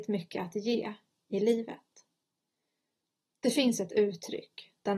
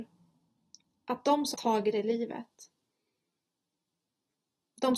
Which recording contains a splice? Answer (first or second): second